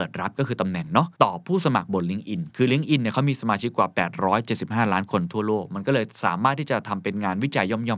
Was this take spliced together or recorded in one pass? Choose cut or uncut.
cut